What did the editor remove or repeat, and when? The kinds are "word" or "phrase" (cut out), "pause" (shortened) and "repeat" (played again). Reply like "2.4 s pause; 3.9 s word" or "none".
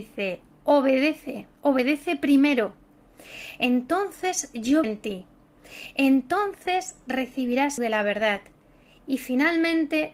1.5 s pause; 4.8 s word; 7.8 s phrase